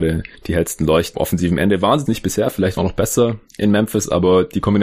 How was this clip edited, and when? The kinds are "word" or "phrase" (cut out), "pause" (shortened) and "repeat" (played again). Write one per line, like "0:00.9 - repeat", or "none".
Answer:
0:01.1 - word
0:02.1 - word
0:02.8 - phrase